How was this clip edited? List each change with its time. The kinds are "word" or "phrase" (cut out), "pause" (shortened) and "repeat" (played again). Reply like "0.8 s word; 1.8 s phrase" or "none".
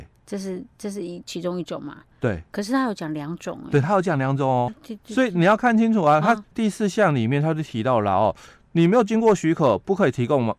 4.7 s word